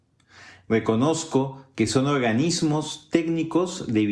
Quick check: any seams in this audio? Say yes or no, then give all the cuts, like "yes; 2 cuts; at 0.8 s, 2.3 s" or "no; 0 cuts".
no; 0 cuts